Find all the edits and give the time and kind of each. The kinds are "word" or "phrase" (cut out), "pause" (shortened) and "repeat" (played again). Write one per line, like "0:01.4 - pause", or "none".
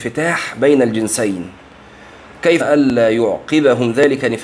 0:02.6 - word